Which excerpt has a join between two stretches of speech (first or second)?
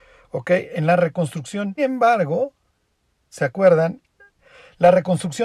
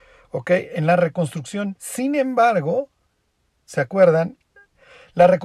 first